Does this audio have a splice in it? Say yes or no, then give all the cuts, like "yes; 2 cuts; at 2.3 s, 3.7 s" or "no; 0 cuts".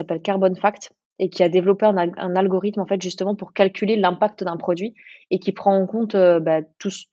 no; 0 cuts